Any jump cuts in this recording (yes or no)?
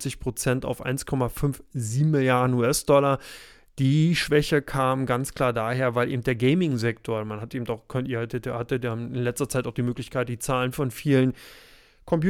no